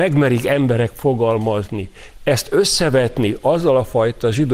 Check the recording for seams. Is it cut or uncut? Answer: uncut